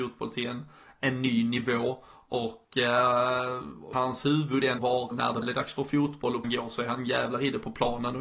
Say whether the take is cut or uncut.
cut